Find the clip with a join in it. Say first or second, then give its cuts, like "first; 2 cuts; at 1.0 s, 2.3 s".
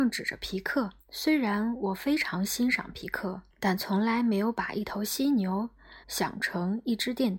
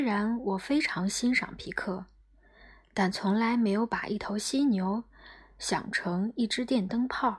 first; 3 cuts; at 1.0 s, 3.5 s, 6.0 s